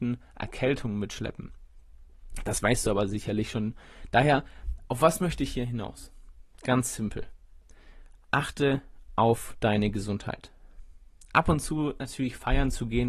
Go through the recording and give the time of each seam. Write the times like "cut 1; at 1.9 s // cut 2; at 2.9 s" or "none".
none